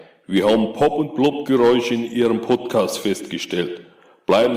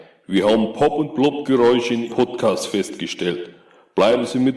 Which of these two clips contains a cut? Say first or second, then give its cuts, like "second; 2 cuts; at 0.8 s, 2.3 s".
second; 1 cut; at 2.1 s